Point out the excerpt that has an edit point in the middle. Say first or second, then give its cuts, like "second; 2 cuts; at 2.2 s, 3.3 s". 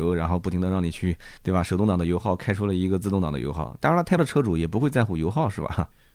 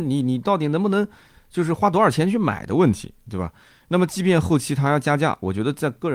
first; 2 cuts; at 1.4 s, 4.2 s